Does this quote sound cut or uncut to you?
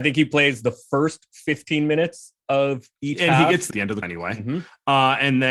cut